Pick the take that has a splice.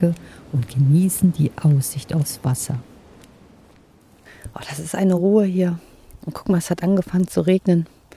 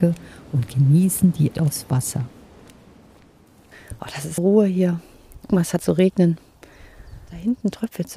second; 4 cuts; at 1.5 s, 4.4 s, 5.5 s, 5.8 s

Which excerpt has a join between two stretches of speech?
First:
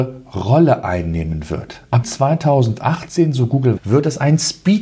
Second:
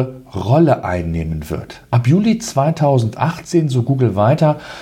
first; 2 cuts; at 2.0 s, 3.8 s

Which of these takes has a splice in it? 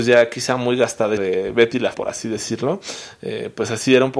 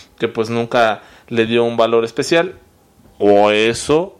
first; 2 cuts; at 1.2 s, 1.9 s

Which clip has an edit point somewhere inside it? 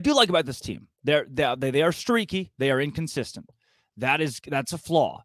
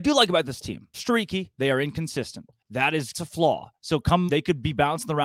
second; 4 cuts; at 0.9 s, 2.6 s, 3.1 s, 4.3 s

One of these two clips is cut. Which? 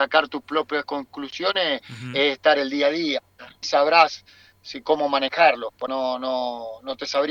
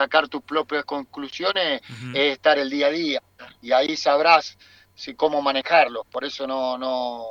first; 2 cuts; at 3.6 s, 5.9 s

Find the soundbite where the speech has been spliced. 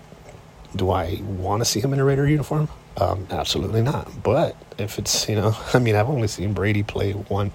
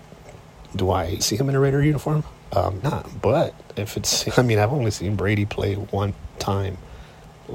second; 3 cuts; at 1.2 s, 2.8 s, 4.3 s

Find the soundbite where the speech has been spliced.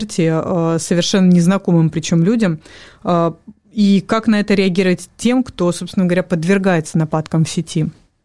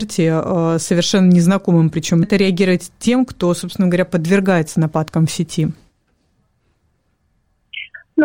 second; 1 cut; at 2.2 s

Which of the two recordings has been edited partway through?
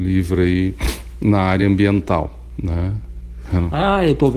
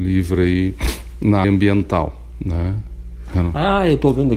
second; 1 cut; at 1.4 s

